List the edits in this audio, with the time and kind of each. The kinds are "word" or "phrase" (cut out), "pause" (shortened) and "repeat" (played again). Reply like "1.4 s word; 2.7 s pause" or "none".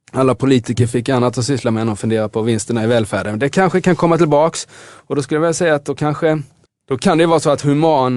6.6 s pause

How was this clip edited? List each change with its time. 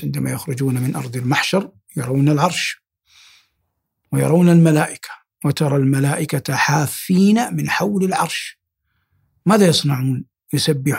none

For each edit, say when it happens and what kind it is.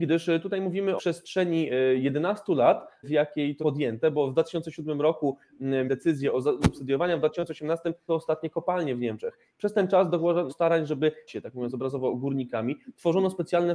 1.0 s word; 3.0 s word; 3.6 s word; 5.9 s word; 6.6 s word; 8.1 s word; 10.5 s word; 11.3 s word

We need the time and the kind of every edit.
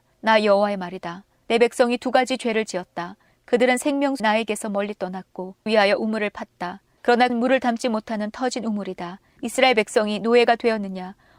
4.2 s word; 5.7 s word; 7.3 s word

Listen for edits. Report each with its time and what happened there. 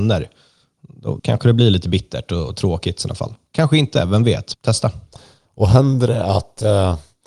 1.2 s word; 4.5 s word

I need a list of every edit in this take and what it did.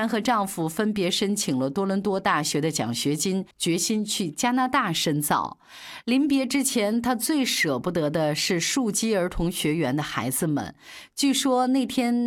3.5 s pause

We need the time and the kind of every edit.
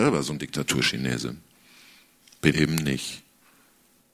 2.5 s word

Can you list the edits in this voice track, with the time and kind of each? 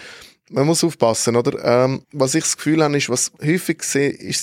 2.0 s pause; 3.4 s pause

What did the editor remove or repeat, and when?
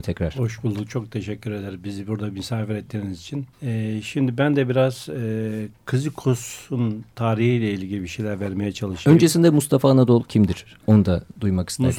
3.5 s pause

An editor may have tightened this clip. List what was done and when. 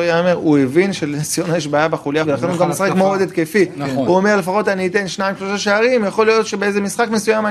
2.2 s word

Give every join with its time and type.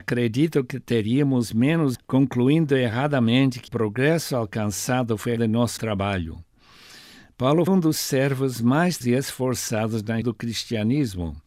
1.9 s word; 3.7 s word; 5.4 s word; 5.8 s word; 7.7 s word; 9.0 s word; 10.2 s word

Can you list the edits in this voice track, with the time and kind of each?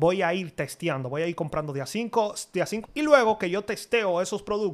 2.8 s word

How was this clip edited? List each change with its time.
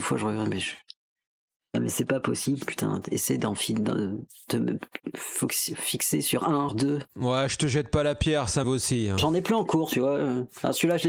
6.7 s word; 8.6 s word

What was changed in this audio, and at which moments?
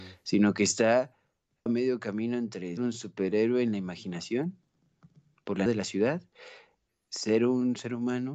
1.7 s word; 2.8 s word; 5.7 s word; 6.9 s word

